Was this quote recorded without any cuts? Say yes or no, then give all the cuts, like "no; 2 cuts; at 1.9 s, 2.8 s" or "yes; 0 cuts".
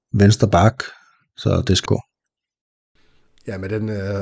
no; 1 cut; at 1.9 s